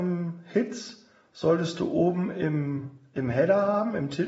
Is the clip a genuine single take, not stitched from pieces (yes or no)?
yes